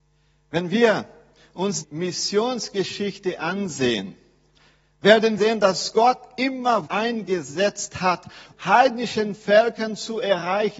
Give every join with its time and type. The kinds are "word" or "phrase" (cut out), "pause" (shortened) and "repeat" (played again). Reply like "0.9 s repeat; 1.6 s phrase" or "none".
1.8 s word; 5.4 s word; 6.9 s word; 8.5 s word